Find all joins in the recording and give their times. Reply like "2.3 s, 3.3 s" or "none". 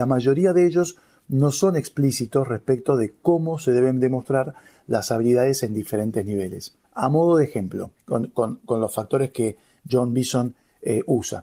6.8 s, 8.0 s